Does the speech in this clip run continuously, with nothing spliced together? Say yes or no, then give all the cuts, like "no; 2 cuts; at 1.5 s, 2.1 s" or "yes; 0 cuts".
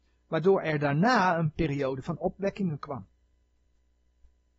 yes; 0 cuts